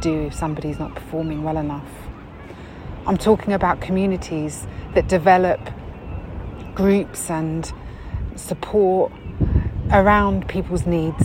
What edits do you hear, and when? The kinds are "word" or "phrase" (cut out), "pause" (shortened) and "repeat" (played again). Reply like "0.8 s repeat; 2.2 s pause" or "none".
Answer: none